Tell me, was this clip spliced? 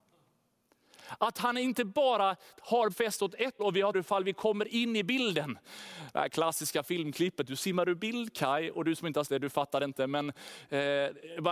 yes; 4 cuts; at 2.9 s, 3.6 s, 3.9 s, 9.2 s

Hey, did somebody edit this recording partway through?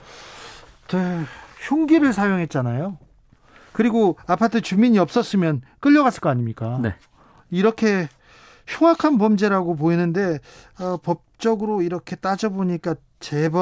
no; 0 cuts

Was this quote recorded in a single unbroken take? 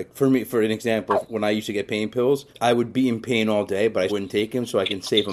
no; 2 cuts; at 2.5 s, 4.1 s

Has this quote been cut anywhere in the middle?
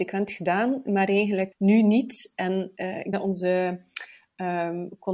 yes; 2 cuts; at 1.5 s, 3.1 s

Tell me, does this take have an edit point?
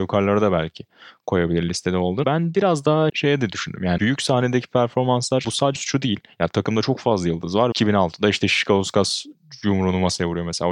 yes; 6 cuts; at 2.2 s, 3.1 s, 4.0 s, 5.4 s, 5.8 s, 7.7 s

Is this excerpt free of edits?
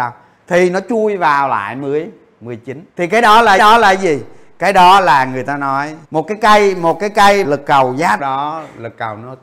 no; 5 cuts; at 2.9 s, 3.6 s, 6.0 s, 7.4 s, 8.2 s

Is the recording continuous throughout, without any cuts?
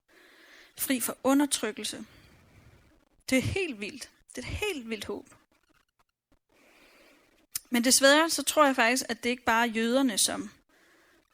yes; 0 cuts

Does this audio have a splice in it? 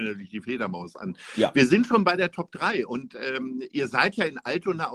no; 0 cuts

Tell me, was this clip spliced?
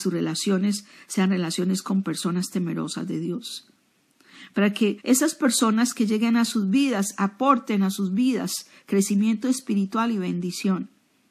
yes; 1 cut; at 5.0 s

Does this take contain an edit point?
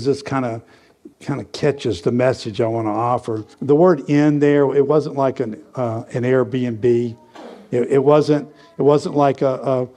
yes; 2 cuts; at 1.1 s, 3.5 s

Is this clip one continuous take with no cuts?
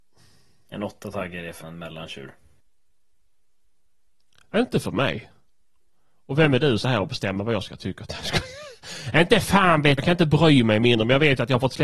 no; 3 cuts; at 1.6 s, 6.8 s, 10.0 s

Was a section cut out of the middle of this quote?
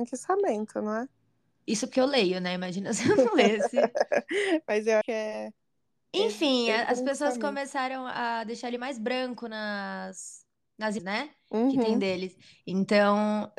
yes; 2 cuts; at 5.0 s, 11.0 s

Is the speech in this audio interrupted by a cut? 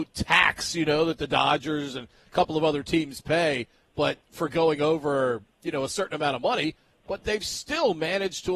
no; 0 cuts

